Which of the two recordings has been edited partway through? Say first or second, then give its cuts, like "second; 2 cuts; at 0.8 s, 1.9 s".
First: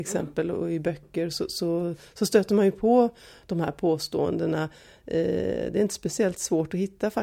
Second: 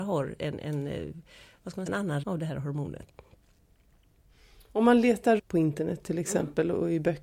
second; 3 cuts; at 1.9 s, 2.2 s, 5.4 s